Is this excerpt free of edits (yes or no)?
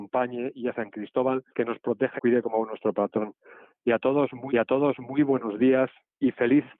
no